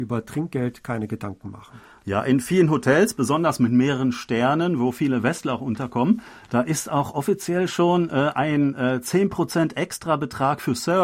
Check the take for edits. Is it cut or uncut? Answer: uncut